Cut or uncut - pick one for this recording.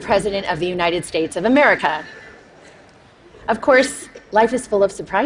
uncut